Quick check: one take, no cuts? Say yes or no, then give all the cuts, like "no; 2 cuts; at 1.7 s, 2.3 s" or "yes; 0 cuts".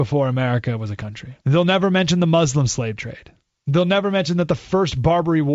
no; 1 cut; at 1.4 s